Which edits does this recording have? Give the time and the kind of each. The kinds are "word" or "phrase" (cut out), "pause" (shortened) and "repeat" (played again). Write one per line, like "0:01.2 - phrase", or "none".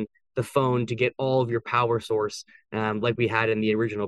none